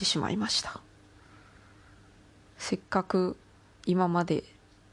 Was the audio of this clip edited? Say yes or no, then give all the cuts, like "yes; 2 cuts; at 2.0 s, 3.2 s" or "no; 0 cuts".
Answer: no; 0 cuts